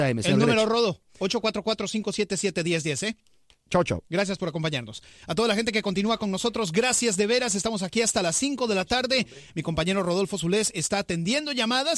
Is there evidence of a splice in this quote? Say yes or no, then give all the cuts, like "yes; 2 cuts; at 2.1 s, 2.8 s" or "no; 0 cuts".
no; 0 cuts